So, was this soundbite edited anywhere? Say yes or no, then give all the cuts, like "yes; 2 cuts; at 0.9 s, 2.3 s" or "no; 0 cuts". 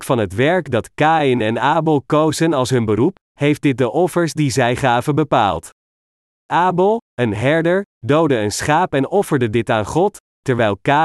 no; 0 cuts